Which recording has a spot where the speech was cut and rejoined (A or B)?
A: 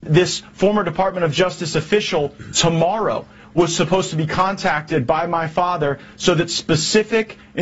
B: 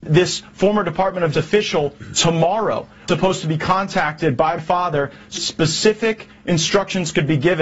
B